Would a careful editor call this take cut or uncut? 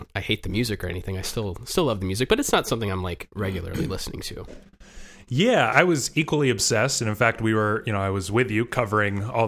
cut